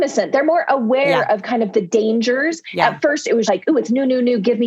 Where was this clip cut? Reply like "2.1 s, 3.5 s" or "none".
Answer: 3.5 s